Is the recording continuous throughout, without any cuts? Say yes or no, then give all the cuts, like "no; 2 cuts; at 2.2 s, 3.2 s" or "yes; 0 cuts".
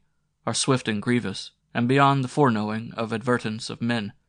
no; 1 cut; at 1.6 s